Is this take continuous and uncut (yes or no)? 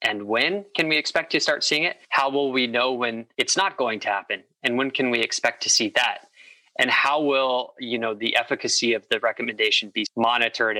yes